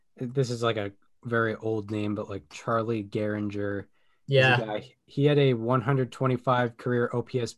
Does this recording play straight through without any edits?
yes; 0 cuts

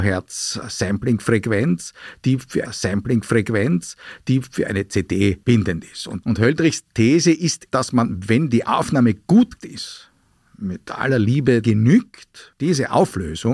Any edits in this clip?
yes; 6 cuts; at 2.6 s, 5.4 s, 6.9 s, 7.7 s, 9.6 s, 11.6 s

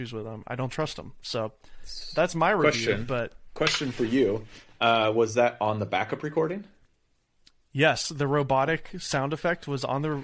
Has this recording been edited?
no; 0 cuts

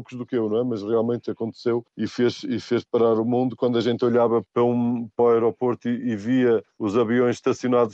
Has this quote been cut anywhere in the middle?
yes; 4 cuts; at 1.9 s, 4.5 s, 5.2 s, 6.7 s

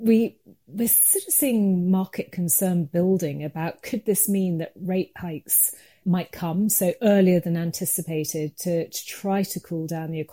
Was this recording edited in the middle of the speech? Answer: no; 0 cuts

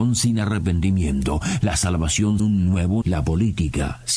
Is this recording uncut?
no; 2 cuts; at 2.4 s, 3.0 s

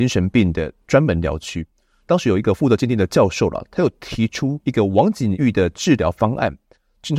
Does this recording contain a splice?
no; 0 cuts

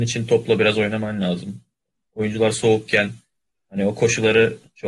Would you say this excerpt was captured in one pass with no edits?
yes; 0 cuts

